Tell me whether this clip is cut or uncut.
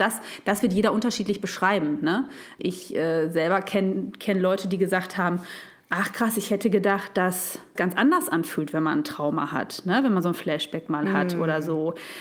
cut